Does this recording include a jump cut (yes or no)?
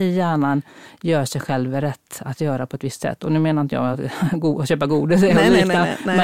no